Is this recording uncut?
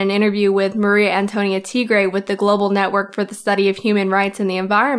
yes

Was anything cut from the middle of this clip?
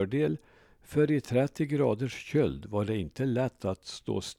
no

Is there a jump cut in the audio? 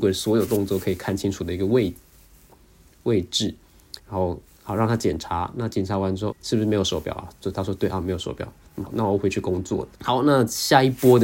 yes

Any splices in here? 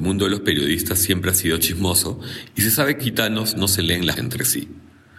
yes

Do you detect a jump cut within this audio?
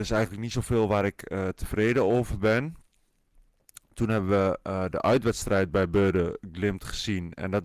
no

